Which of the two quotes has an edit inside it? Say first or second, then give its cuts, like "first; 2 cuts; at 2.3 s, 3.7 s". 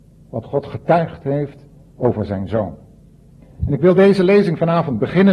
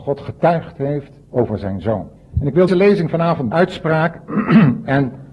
second; 4 cuts; at 1.2 s, 2.2 s, 2.7 s, 3.5 s